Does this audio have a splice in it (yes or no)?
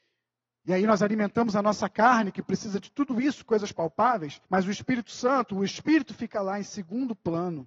yes